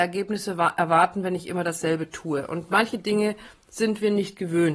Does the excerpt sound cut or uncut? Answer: uncut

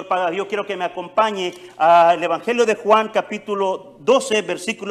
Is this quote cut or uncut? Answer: uncut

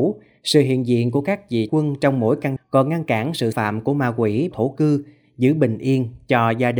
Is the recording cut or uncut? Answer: cut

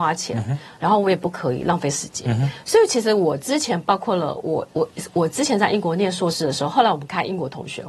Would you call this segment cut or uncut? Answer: uncut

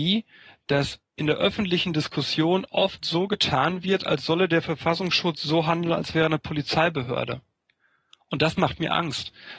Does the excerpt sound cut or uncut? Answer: cut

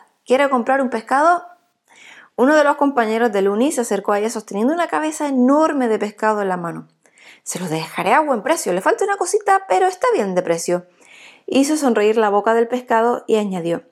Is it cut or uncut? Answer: uncut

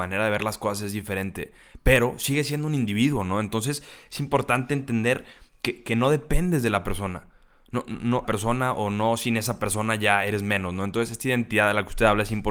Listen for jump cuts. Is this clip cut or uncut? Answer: cut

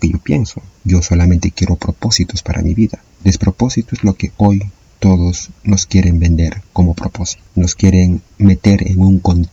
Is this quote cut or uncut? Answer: cut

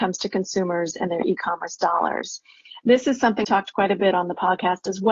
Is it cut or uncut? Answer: cut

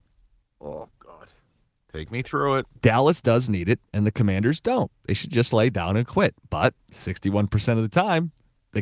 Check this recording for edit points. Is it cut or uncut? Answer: uncut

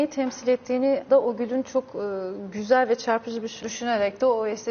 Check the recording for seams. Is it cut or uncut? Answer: cut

